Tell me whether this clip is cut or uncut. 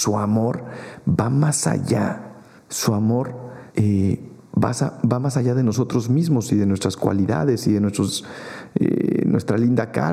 cut